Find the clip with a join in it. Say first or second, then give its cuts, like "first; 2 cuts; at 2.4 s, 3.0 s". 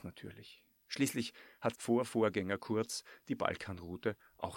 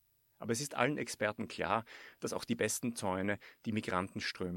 first; 1 cut; at 1.7 s